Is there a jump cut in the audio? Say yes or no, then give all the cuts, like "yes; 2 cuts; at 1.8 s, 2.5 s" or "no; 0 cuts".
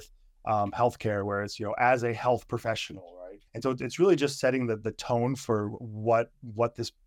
yes; 1 cut; at 3.5 s